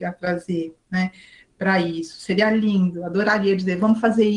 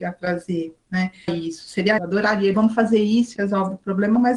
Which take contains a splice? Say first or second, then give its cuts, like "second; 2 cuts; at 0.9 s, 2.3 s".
second; 4 cuts; at 1.3 s, 2.0 s, 2.5 s, 3.4 s